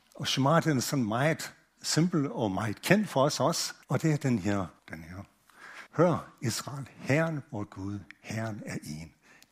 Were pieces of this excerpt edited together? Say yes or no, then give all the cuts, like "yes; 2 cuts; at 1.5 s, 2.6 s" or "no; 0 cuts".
yes; 3 cuts; at 3.8 s, 4.8 s, 5.9 s